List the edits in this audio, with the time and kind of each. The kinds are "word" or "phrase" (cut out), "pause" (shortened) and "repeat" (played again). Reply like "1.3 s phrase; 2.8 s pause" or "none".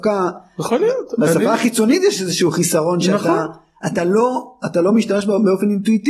none